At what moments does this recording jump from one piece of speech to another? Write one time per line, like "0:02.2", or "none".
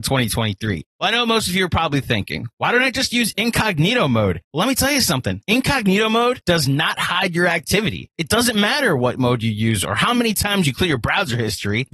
none